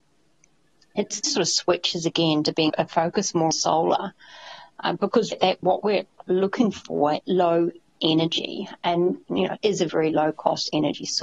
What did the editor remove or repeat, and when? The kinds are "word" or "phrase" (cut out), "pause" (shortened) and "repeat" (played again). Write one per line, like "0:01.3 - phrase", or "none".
0:01.2 - word
0:02.7 - word
0:03.5 - word
0:05.3 - word
0:05.6 - word
0:07.2 - word
0:08.0 - word
0:09.6 - word
0:09.9 - word

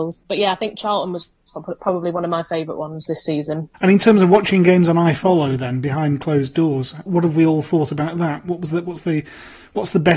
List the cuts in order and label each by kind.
0:07.1 - word

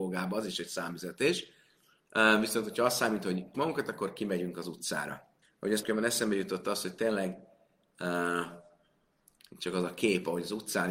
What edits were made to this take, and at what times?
0:03.5 - word
0:05.4 - pause
0:05.8 - word

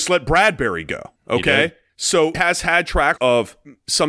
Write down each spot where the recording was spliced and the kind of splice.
0:01.2 - pause
0:02.3 - word
0:03.2 - word

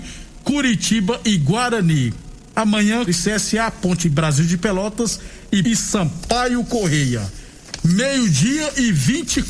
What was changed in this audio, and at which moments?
0:03.1 - word
0:04.0 - word
0:05.6 - word

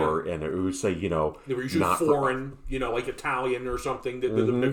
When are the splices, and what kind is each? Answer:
none

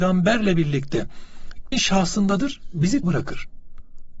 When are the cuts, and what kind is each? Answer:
0:01.7 - word
0:03.0 - word

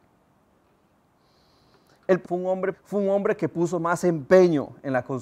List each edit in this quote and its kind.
0:02.2 - word
0:02.7 - phrase

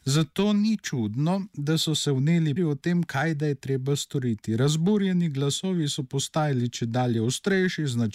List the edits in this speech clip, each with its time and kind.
0:02.6 - word

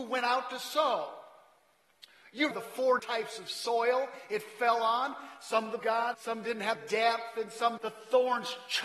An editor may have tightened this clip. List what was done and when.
0:02.5 - word
0:03.0 - word
0:05.8 - word
0:06.1 - word
0:06.8 - word
0:07.8 - word

